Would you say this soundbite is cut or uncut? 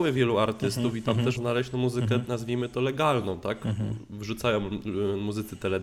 cut